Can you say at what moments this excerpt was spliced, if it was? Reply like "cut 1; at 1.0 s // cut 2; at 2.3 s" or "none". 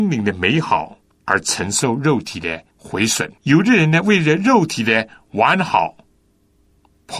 cut 1; at 1.1 s // cut 2; at 2.7 s // cut 3; at 3.4 s